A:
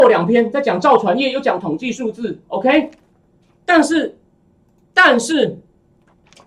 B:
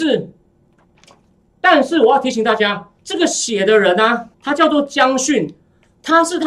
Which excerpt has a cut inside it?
B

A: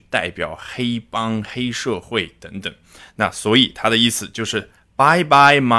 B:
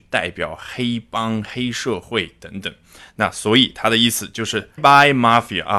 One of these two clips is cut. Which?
B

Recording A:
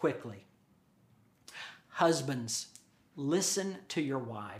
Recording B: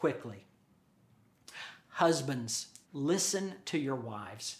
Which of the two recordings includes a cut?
B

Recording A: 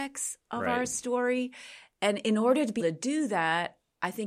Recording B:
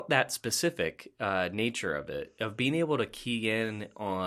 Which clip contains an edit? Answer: A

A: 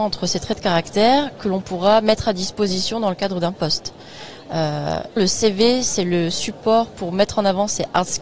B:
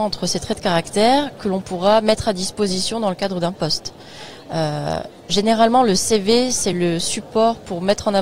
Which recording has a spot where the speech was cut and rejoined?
A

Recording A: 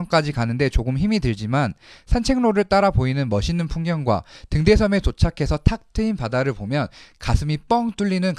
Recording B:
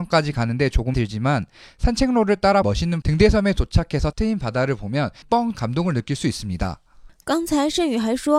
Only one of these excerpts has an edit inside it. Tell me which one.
B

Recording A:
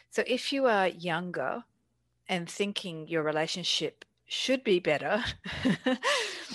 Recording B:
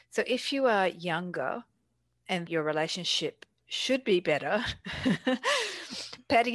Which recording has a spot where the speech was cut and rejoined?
B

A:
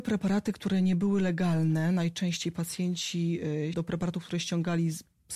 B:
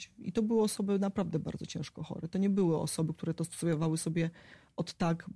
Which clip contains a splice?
A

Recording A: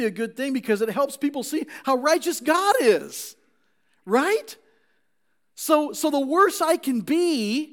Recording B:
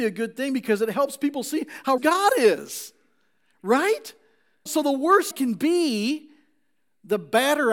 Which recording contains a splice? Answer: B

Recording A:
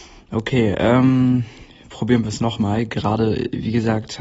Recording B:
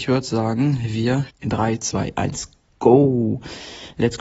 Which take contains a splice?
B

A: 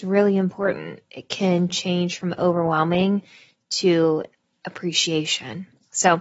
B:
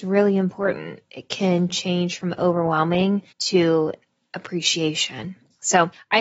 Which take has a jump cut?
B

